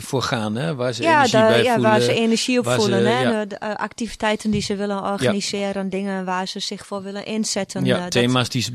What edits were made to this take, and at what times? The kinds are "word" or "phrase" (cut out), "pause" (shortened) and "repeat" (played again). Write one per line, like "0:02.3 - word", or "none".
none